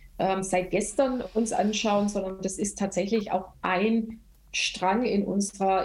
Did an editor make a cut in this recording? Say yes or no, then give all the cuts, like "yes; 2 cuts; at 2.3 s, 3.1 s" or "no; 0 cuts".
no; 0 cuts